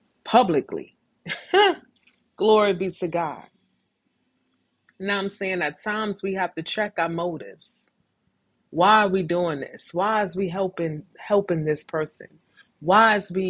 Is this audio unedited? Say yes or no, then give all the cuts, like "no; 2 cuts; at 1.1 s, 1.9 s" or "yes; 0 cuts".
yes; 0 cuts